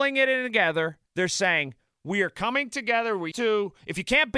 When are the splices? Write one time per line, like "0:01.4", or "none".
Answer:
0:01.1
0:03.3